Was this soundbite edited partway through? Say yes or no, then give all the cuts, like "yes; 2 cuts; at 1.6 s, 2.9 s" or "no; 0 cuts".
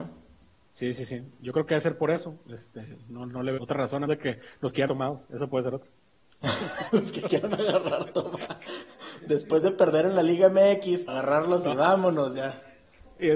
yes; 4 cuts; at 3.6 s, 4.1 s, 4.9 s, 11.1 s